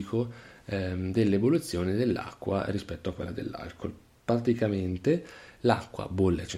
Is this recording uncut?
yes; 0 cuts

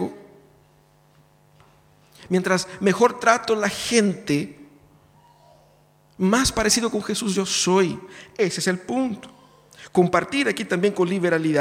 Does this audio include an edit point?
no; 0 cuts

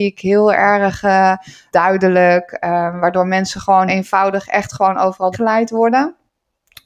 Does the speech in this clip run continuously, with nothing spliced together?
no; 3 cuts; at 1.7 s, 3.9 s, 5.3 s

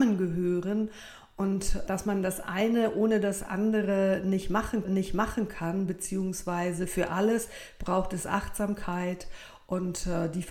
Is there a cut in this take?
yes; 2 cuts; at 1.9 s, 4.8 s

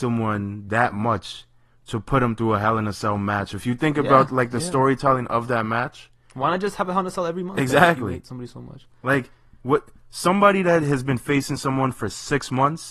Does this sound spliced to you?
no; 0 cuts

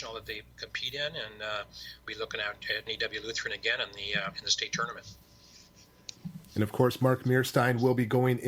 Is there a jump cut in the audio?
yes; 3 cuts; at 2.1 s, 2.9 s, 6.5 s

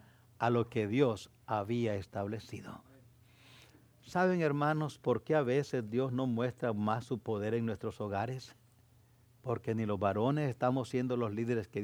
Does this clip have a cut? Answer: yes; 1 cut; at 9.2 s

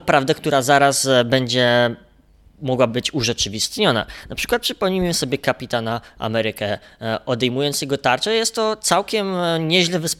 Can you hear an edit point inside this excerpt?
no; 0 cuts

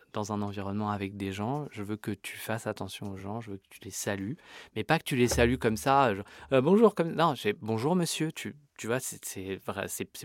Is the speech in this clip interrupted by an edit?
no; 0 cuts

